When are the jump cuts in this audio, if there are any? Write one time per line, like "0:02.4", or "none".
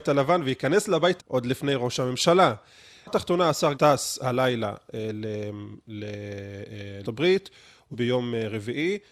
0:01.2
0:03.1
0:03.7
0:07.0
0:07.9